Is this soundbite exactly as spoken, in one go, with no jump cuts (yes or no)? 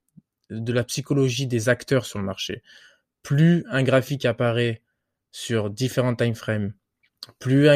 yes